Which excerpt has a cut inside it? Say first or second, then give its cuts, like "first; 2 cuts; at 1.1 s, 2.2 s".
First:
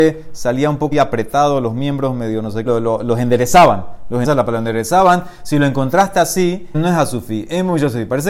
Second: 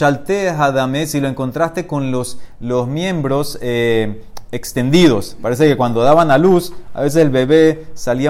first; 4 cuts; at 0.9 s, 2.7 s, 4.2 s, 6.7 s